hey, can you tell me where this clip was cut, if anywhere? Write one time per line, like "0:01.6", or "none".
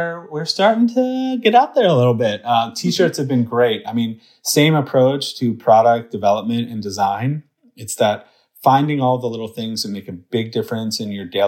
none